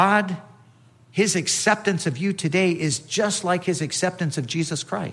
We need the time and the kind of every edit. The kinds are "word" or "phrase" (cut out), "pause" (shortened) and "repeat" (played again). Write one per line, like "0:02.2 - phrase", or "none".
none